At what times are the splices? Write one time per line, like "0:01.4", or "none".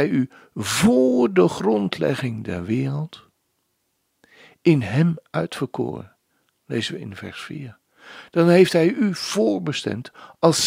none

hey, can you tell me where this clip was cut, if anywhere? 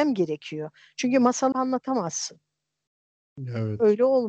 0:01.5

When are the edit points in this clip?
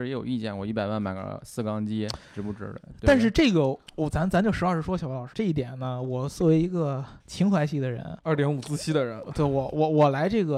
0:03.9
0:05.3
0:07.2
0:08.2

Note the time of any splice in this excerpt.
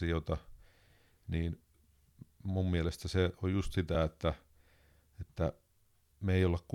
none

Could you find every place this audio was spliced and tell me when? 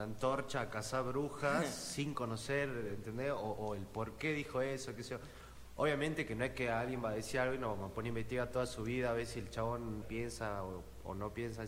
0:10.0

